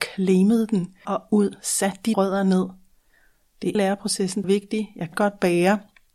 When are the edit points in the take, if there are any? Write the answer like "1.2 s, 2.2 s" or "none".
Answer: 1.0 s, 2.1 s, 3.7 s, 4.4 s, 5.1 s